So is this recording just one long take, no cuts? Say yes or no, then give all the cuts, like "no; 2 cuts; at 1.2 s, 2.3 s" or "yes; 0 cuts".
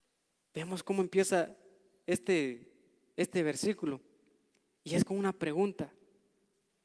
yes; 0 cuts